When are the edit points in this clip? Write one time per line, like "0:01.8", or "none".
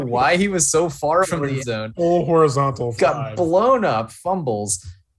0:01.2
0:01.6
0:03.0

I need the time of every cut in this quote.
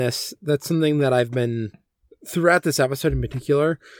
none

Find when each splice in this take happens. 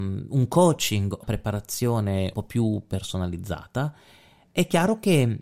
0:01.2
0:02.3

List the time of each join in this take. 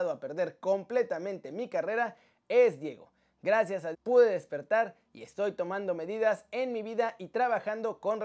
0:03.9

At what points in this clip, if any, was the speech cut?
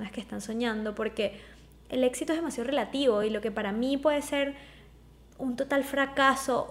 none

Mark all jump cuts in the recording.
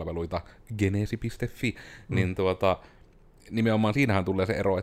none

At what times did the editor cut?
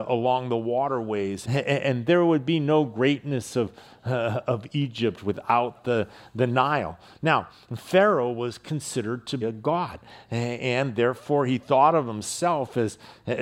0:01.4
0:09.4

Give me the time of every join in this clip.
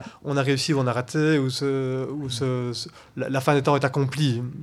none

